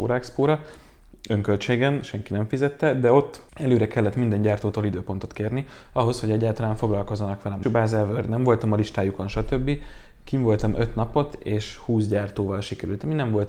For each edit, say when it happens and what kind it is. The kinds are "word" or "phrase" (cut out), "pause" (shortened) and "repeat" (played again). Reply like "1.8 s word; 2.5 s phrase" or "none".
3.5 s pause; 7.6 s phrase